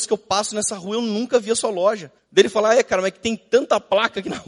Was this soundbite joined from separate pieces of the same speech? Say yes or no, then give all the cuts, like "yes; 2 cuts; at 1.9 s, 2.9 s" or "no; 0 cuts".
no; 0 cuts